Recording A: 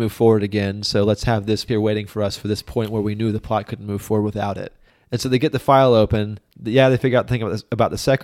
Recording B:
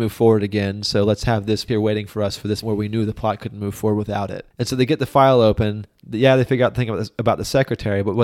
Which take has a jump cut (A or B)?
B